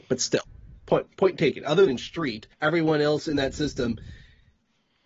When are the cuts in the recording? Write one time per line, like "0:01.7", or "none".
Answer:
0:01.9
0:02.5